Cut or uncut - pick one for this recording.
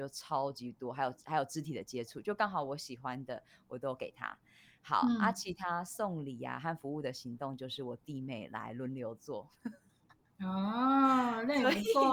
uncut